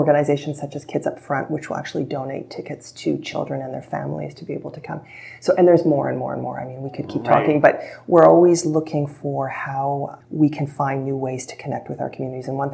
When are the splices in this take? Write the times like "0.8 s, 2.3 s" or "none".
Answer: 10.2 s